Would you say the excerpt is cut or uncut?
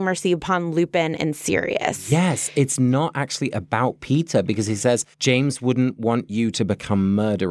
cut